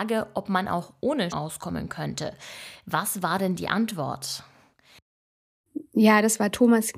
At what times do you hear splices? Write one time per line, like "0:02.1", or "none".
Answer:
0:01.3